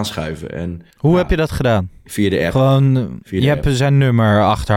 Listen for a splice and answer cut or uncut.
cut